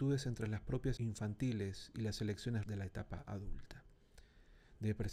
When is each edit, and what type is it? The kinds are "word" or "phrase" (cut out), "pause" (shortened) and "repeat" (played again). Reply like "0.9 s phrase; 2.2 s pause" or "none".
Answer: 1.0 s word; 2.6 s word